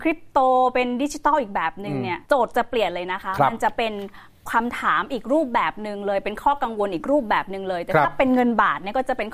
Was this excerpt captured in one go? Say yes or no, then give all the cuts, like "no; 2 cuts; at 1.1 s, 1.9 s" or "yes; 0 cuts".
no; 1 cut; at 2.2 s